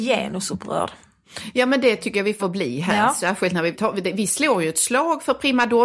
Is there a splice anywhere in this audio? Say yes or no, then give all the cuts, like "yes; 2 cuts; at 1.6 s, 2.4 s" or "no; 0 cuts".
yes; 2 cuts; at 2.4 s, 3.7 s